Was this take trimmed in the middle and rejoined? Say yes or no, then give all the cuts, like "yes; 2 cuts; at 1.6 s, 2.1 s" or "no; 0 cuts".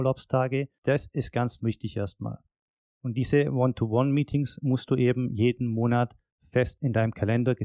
no; 0 cuts